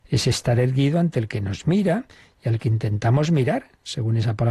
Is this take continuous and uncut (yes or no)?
yes